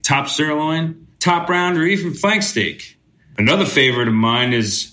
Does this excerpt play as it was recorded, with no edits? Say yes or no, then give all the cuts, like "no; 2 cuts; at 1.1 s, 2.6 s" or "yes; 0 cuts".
yes; 0 cuts